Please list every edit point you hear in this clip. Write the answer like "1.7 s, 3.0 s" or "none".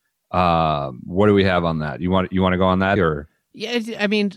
3.0 s